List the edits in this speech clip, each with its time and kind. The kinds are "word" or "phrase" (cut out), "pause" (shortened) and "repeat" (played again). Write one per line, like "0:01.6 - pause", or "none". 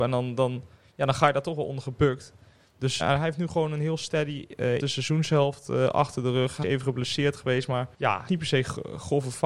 0:03.0 - word
0:04.8 - word
0:06.6 - word
0:07.9 - pause
0:08.3 - phrase